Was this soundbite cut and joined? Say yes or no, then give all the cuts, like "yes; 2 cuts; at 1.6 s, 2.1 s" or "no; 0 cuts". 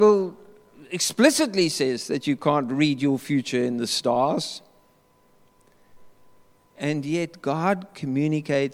no; 0 cuts